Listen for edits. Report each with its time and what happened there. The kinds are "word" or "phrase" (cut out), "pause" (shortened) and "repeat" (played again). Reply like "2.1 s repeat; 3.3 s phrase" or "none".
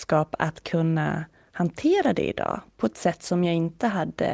none

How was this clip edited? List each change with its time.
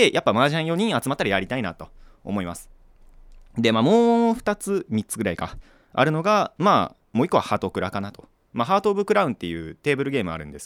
none

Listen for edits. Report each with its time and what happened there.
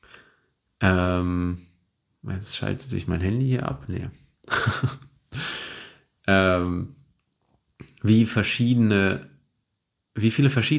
none

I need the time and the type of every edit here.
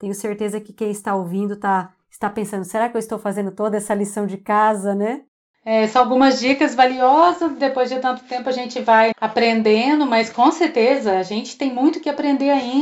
9.1 s word

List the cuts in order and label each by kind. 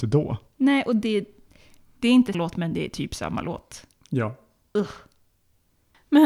2.3 s word

